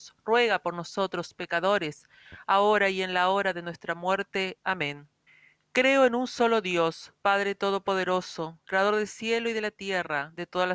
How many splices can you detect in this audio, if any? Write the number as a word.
one